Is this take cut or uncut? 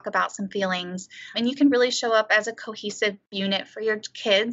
cut